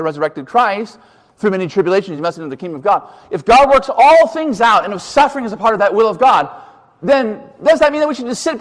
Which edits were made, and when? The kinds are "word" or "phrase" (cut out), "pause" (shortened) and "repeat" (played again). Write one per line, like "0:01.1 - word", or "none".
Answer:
none